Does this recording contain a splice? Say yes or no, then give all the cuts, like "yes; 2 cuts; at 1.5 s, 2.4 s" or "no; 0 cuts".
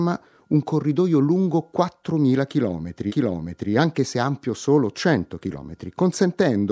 yes; 1 cut; at 3.1 s